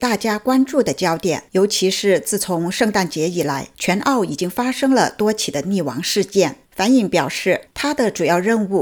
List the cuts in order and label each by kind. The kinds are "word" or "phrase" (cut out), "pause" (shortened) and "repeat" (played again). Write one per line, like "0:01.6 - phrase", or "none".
0:01.5 - pause
0:03.7 - pause
0:06.6 - pause
0:07.7 - pause